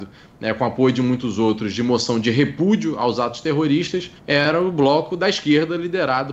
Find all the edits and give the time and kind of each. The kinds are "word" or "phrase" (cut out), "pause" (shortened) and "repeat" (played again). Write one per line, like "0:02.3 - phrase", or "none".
0:04.2 - pause